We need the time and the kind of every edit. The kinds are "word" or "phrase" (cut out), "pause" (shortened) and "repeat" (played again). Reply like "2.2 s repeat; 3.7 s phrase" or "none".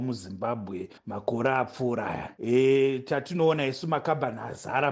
1.0 s pause